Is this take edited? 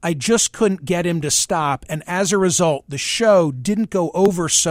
no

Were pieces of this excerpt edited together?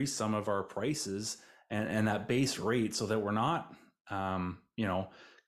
no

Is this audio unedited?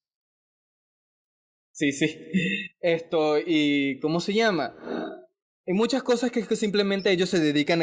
yes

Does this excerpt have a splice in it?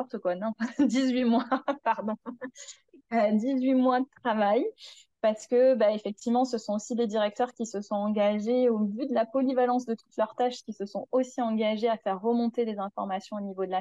no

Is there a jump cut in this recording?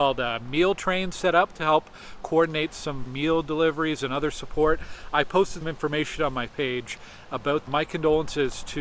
yes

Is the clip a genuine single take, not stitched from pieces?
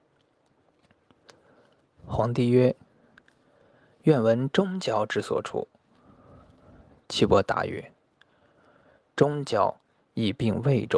yes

